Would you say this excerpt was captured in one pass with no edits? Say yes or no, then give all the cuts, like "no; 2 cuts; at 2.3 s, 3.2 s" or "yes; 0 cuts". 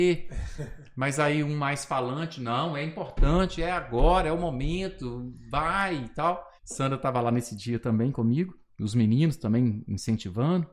no; 1 cut; at 6.6 s